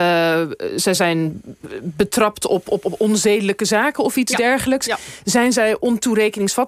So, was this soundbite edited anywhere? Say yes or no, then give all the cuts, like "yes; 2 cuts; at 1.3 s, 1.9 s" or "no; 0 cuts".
no; 0 cuts